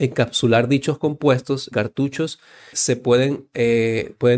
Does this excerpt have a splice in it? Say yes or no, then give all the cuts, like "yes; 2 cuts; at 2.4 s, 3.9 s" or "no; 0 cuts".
yes; 2 cuts; at 1.7 s, 2.7 s